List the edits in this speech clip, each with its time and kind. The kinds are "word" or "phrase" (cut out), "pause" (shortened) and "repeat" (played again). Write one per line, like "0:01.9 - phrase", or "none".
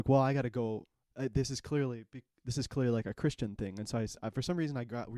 none